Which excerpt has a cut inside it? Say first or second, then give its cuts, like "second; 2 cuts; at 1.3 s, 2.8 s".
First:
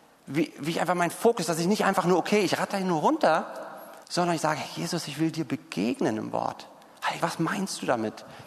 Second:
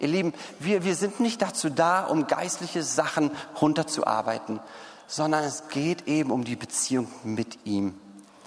first; 2 cuts; at 4.0 s, 7.2 s